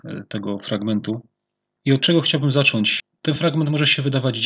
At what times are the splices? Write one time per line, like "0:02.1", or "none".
none